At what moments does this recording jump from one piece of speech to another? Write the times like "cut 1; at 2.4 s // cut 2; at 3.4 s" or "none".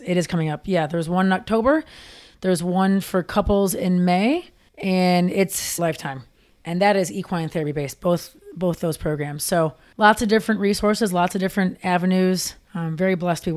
cut 1; at 5.8 s